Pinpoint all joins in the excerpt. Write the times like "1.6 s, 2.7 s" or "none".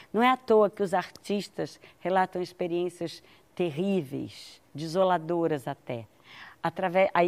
none